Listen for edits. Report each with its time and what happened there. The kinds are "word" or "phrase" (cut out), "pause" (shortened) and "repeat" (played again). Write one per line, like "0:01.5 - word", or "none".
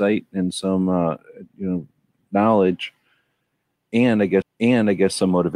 0:04.4 - repeat